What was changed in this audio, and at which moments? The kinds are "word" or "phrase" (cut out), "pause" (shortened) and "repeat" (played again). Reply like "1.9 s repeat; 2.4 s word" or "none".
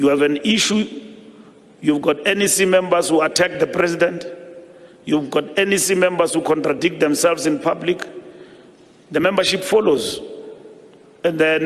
none

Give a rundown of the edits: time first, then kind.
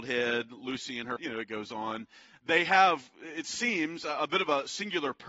1.2 s word

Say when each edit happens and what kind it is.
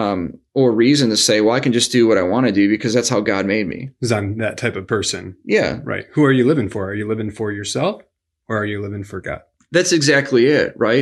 none

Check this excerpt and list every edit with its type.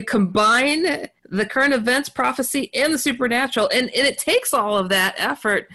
1.2 s pause

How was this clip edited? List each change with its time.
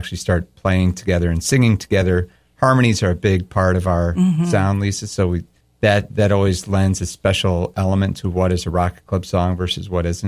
5.6 s pause

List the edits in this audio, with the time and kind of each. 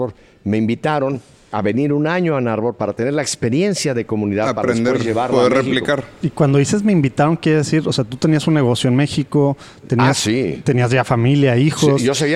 none

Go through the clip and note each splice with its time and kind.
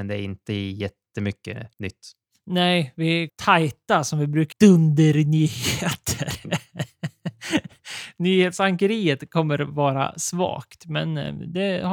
1.7 s pause; 3.3 s phrase; 4.5 s phrase

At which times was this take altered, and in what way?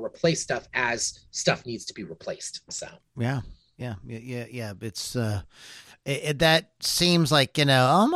none

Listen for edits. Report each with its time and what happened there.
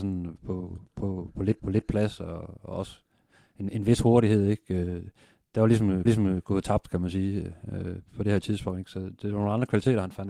1.6 s repeat; 6.1 s repeat

